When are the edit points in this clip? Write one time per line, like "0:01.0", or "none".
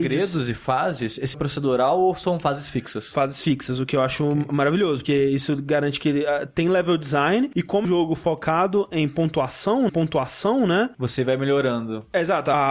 0:01.3
0:05.0
0:07.8
0:09.9